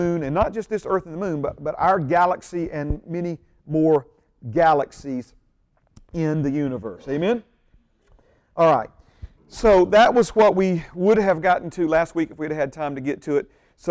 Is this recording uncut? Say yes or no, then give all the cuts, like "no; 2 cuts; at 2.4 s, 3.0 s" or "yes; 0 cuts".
yes; 0 cuts